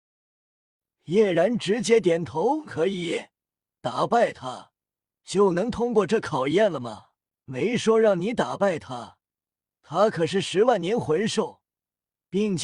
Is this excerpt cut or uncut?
cut